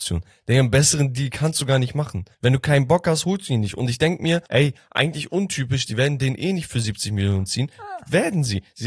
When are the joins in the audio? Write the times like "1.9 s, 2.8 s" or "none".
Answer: 2.3 s, 4.5 s